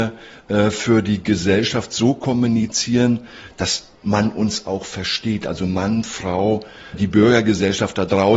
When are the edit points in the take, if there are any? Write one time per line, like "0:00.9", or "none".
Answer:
0:06.9